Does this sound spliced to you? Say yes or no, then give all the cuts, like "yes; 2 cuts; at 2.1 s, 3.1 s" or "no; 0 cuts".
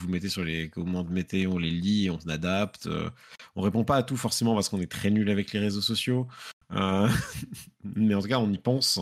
no; 0 cuts